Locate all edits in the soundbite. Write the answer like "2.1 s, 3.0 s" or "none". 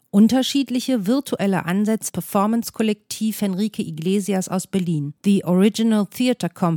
2.1 s, 5.2 s